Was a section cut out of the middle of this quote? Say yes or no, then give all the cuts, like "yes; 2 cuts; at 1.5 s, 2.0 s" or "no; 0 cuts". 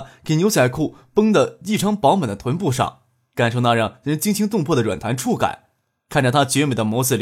no; 0 cuts